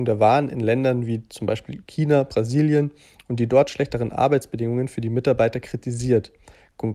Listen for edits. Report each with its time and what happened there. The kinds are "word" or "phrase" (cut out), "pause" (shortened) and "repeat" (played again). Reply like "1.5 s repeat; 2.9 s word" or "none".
none